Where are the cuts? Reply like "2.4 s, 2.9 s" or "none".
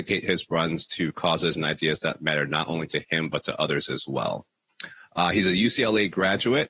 none